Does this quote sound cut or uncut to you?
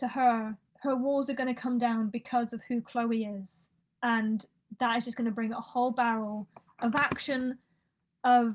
uncut